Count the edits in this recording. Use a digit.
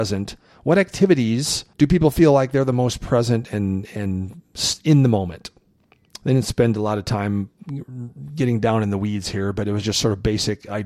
1